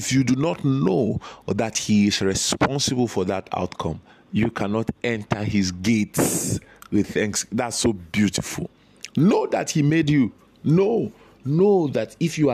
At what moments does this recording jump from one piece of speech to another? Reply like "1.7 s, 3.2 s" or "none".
none